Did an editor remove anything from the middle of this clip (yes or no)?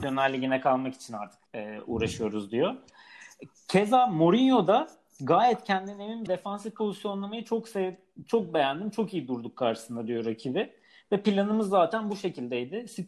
yes